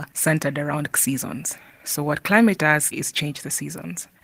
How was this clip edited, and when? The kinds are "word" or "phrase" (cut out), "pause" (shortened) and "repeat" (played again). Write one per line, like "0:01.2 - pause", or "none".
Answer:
0:00.9 - word
0:02.6 - word
0:02.9 - word